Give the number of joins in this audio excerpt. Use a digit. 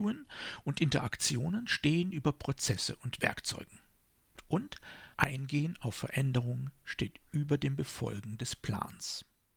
1